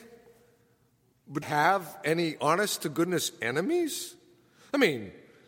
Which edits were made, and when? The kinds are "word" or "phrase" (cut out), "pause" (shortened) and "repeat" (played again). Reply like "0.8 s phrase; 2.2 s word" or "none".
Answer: 1.4 s phrase